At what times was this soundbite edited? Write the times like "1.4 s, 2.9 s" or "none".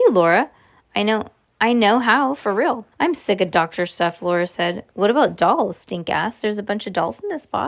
2.9 s